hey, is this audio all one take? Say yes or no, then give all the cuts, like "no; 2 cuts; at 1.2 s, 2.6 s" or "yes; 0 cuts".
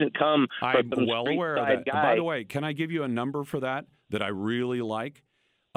yes; 0 cuts